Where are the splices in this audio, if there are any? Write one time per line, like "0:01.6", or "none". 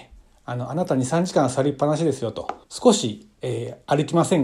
0:02.6